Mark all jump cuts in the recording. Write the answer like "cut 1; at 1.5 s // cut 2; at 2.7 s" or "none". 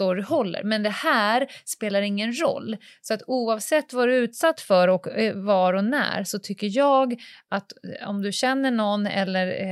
none